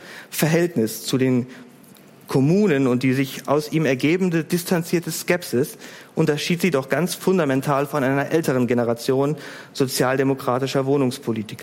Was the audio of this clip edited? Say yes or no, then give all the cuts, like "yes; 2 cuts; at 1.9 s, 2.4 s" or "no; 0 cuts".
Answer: no; 0 cuts